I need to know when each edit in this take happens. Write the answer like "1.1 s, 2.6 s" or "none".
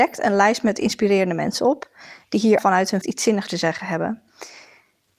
2.6 s, 3.0 s, 3.5 s